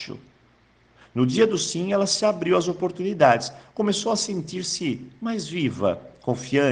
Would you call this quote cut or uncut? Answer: uncut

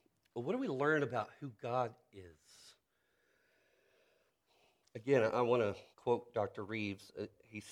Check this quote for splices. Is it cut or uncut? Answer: cut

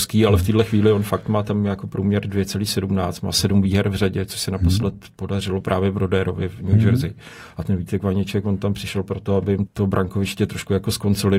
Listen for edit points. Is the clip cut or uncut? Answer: cut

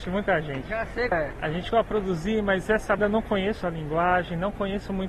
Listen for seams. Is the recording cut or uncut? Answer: cut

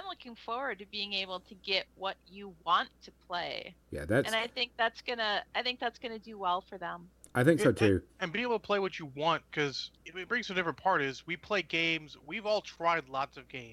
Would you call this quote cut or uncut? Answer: cut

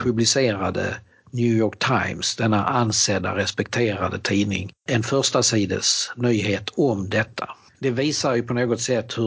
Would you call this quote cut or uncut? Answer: cut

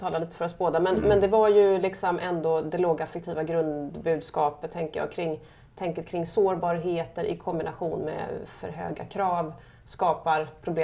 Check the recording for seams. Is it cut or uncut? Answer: uncut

